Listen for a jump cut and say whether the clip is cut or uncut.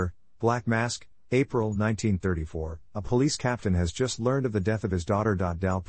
uncut